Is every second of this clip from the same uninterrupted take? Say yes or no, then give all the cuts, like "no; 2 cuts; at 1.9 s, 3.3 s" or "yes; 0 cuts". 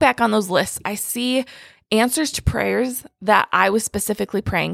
yes; 0 cuts